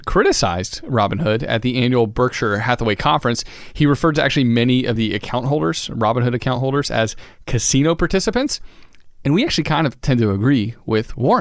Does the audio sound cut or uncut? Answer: uncut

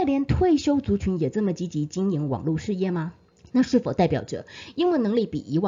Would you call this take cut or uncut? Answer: cut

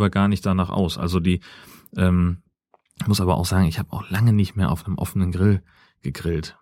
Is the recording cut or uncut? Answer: uncut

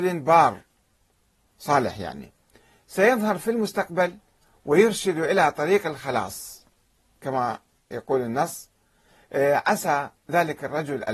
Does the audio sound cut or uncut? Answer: uncut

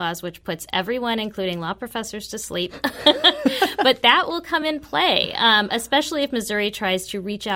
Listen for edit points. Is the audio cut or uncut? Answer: uncut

